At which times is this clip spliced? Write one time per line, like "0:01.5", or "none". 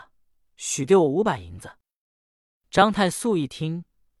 none